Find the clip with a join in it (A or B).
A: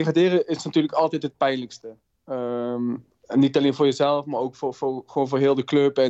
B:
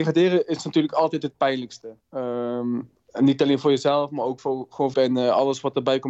B